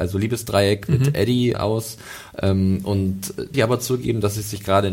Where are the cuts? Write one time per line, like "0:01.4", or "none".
0:01.5
0:03.5